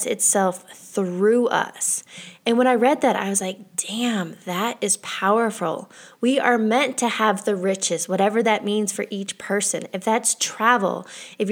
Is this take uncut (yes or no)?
yes